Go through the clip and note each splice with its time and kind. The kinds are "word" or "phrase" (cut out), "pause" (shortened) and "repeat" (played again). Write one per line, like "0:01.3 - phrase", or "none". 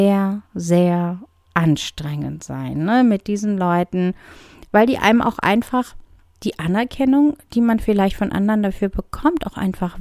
none